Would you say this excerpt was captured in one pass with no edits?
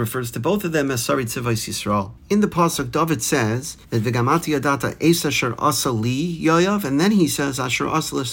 no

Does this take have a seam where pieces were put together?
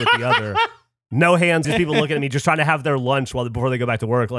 yes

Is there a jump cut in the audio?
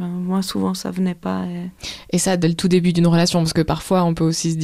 no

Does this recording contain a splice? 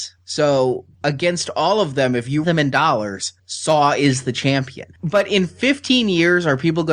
yes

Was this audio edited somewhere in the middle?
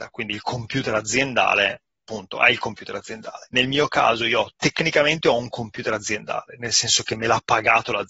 no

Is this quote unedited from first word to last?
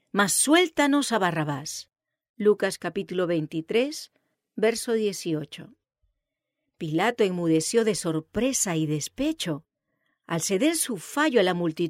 yes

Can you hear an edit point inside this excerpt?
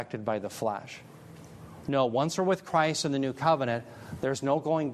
no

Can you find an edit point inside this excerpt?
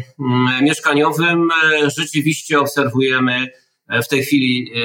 no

